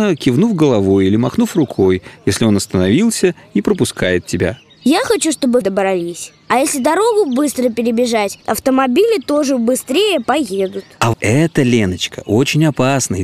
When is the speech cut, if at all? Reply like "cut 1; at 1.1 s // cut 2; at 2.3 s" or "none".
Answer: cut 1; at 5.6 s // cut 2; at 11.1 s